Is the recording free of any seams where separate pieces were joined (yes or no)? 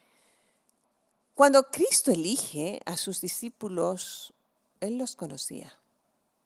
yes